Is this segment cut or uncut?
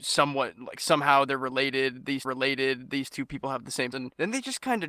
cut